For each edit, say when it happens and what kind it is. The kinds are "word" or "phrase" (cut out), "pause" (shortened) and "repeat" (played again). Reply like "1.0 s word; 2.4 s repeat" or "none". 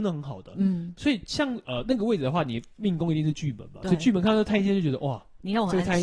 0.9 s word